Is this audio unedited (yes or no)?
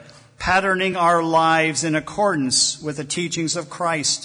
yes